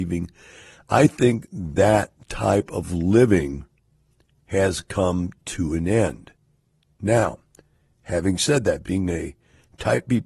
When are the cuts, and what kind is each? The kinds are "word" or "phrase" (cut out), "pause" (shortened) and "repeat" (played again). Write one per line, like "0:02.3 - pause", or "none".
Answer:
none